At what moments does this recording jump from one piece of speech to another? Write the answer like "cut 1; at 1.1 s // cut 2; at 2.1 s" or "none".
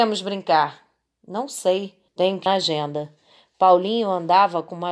cut 1; at 2.1 s // cut 2; at 2.5 s